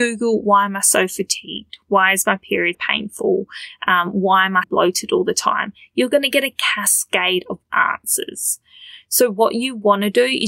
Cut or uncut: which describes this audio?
cut